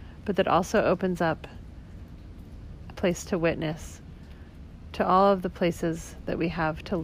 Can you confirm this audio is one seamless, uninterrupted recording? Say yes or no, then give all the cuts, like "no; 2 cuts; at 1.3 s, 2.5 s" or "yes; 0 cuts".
no; 1 cut; at 2.9 s